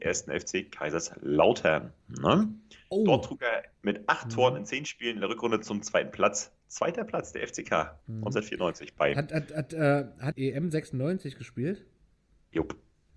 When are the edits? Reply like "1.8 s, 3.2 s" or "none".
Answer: 2.0 s, 3.7 s, 6.6 s, 8.0 s, 10.3 s